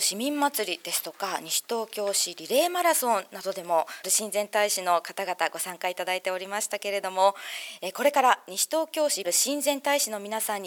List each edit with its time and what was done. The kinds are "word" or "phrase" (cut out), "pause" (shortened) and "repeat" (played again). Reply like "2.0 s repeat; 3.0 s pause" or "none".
4.0 s word; 9.2 s word